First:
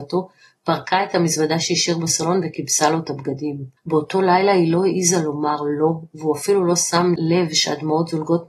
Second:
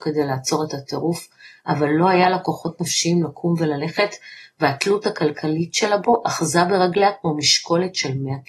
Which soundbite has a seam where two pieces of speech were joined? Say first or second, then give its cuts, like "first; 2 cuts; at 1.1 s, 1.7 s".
first; 1 cut; at 3.8 s